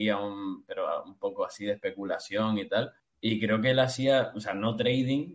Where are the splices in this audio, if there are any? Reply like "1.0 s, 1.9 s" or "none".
3.0 s